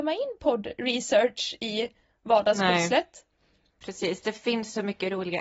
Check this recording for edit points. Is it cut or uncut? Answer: uncut